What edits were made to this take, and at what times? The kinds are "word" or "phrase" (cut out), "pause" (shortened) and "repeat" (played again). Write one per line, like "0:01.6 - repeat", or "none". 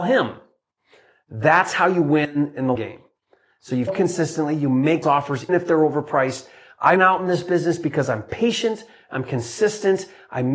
0:02.7 - word
0:03.9 - word
0:05.0 - word
0:05.5 - word
0:07.0 - word